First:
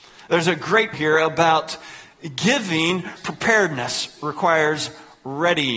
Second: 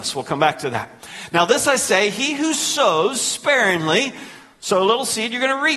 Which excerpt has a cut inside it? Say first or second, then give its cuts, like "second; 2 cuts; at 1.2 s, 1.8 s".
first; 2 cuts; at 0.9 s, 3.2 s